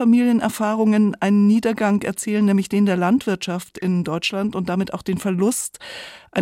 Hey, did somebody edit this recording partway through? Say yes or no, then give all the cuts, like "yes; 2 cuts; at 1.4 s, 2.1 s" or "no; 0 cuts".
no; 0 cuts